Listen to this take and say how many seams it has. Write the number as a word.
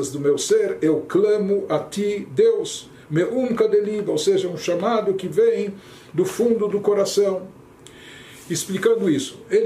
zero